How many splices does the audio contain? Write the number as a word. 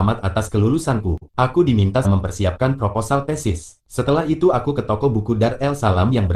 three